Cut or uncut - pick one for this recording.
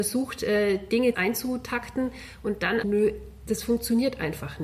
cut